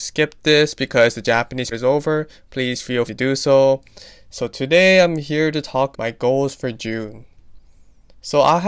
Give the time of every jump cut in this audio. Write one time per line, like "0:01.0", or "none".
0:01.7
0:03.1
0:05.9